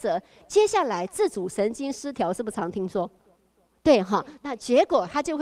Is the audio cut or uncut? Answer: uncut